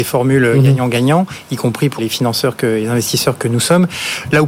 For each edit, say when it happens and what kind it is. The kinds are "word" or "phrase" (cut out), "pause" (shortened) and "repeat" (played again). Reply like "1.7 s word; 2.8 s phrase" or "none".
2.0 s word; 3.4 s word